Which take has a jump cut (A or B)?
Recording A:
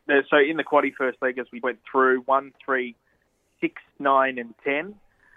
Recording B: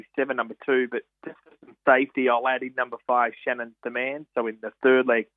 A